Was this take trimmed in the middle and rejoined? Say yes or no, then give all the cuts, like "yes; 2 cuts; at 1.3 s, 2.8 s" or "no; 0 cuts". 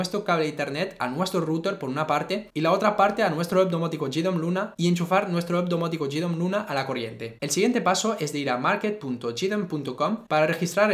no; 0 cuts